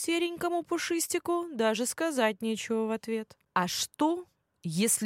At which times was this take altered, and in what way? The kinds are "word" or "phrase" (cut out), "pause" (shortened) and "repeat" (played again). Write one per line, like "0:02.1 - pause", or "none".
0:03.4 - pause